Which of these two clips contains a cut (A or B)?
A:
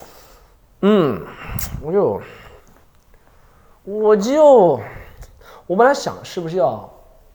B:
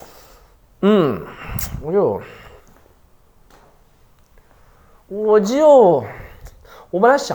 A